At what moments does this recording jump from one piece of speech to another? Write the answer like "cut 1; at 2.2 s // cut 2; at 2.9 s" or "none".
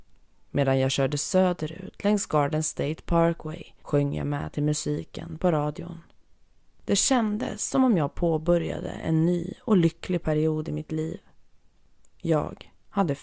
none